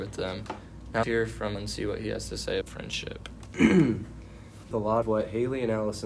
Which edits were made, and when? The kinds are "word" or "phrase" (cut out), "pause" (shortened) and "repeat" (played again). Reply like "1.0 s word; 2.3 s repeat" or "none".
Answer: 1.0 s word; 1.5 s word; 2.6 s word; 4.7 s phrase; 5.0 s word